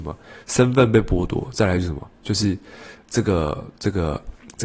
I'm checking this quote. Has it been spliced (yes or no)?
no